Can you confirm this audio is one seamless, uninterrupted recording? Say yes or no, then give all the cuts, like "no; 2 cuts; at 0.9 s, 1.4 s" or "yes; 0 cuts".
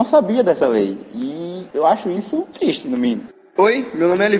yes; 0 cuts